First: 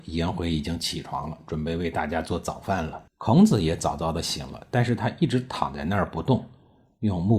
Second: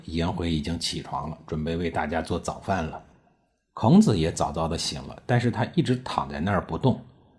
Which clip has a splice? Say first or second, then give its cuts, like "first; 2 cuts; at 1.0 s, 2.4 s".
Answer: first; 1 cut; at 3.1 s